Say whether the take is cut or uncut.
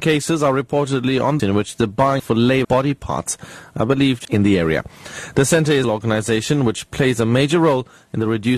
cut